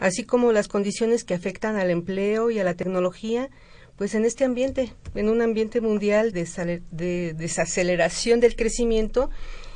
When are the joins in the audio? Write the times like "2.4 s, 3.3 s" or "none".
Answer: 6.3 s

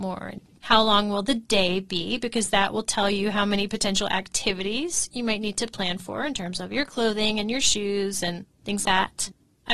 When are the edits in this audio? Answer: 8.8 s

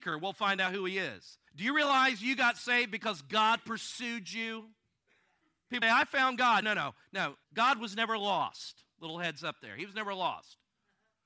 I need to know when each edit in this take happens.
1.5 s, 5.8 s, 6.6 s, 7.4 s

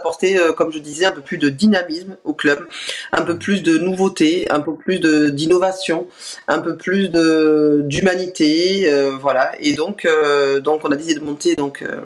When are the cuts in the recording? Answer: none

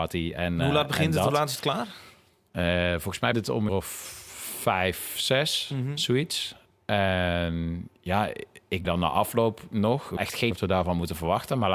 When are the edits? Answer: 3.3 s, 3.7 s, 8.8 s, 10.2 s, 10.5 s

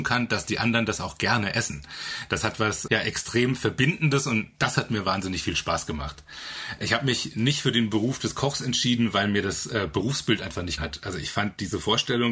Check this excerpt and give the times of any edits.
2.9 s, 10.8 s

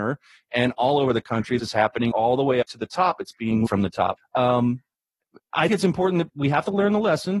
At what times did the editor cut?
1.6 s, 2.1 s, 2.6 s, 3.7 s, 4.2 s, 5.7 s, 6.3 s

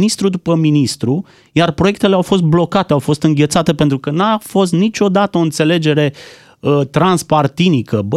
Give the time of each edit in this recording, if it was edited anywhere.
none

